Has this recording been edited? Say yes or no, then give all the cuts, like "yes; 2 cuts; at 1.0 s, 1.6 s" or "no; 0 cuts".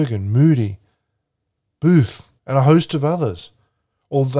yes; 1 cut; at 2.4 s